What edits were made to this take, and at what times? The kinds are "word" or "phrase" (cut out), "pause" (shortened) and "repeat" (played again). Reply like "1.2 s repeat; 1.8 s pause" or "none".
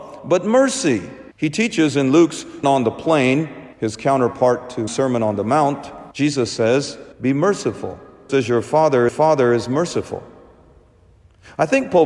1.3 s pause; 2.6 s word; 3.7 s pause; 4.9 s word; 6.1 s pause; 7.1 s pause; 8.3 s word; 9.1 s repeat

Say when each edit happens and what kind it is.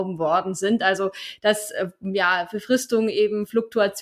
none

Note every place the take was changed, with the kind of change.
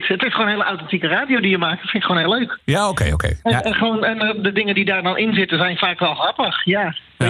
2.6 s pause

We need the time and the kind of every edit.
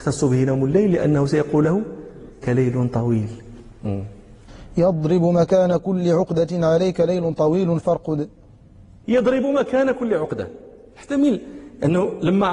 2.4 s word

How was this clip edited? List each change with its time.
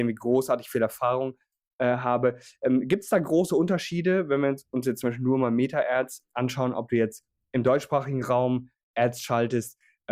none

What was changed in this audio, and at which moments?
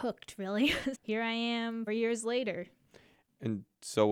0.9 s word; 1.9 s word

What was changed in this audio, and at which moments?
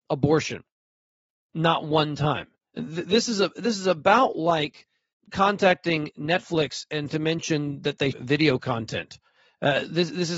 2.7 s pause; 5.1 s pause; 7.1 s word; 8.1 s word

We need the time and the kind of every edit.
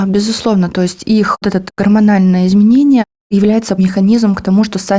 1.4 s word; 3.8 s word

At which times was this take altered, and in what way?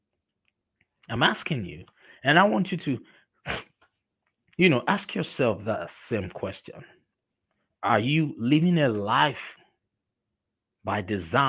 none

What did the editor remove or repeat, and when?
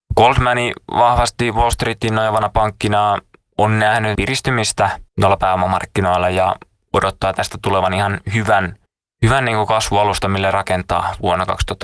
4.1 s phrase; 5.1 s pause; 8.9 s pause

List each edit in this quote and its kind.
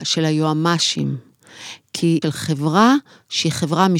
2.2 s phrase

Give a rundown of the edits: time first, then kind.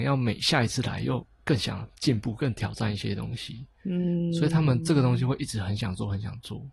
none

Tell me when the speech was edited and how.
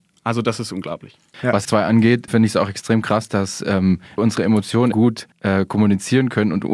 1.6 s phrase; 2.3 s word; 4.2 s word; 4.9 s word; 5.3 s pause

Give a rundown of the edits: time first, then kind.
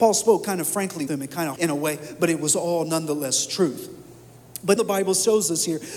1.1 s word; 1.6 s word; 4.8 s word

